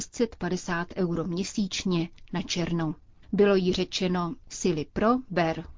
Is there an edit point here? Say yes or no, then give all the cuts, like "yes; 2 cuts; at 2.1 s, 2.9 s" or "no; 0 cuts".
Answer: no; 0 cuts